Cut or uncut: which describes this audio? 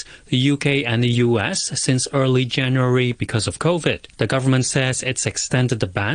cut